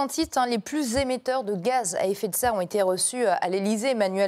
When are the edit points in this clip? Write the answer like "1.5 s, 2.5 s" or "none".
none

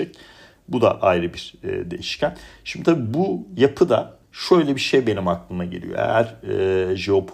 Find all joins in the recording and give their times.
4.2 s

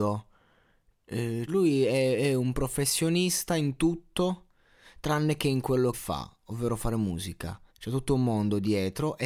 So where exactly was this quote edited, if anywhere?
1.5 s, 5.9 s, 7.7 s

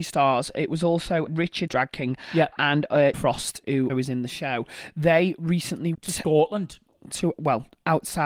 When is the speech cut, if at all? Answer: 1.3 s, 1.7 s, 3.1 s, 3.9 s, 5.9 s

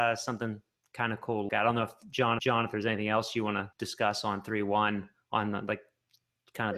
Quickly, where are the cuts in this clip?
1.5 s, 2.4 s, 3.7 s

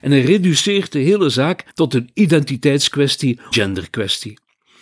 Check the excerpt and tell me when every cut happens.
1.7 s, 3.5 s

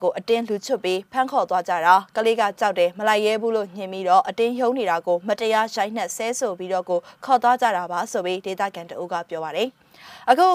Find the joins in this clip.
none

